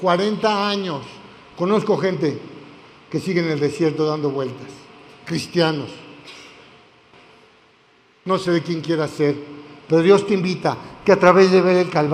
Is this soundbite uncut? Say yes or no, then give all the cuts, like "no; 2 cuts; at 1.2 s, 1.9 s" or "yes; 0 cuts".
yes; 0 cuts